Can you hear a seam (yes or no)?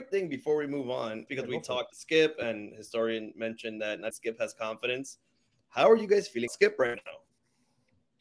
yes